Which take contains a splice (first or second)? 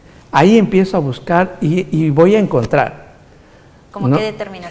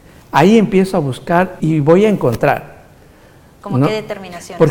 second